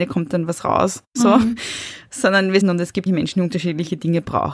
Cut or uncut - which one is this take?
cut